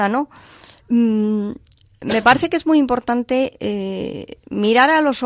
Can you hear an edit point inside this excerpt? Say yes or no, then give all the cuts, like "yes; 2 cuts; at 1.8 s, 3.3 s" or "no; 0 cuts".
no; 0 cuts